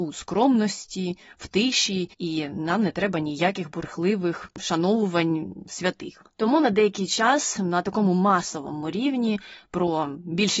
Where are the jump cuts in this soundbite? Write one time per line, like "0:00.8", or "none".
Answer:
0:02.1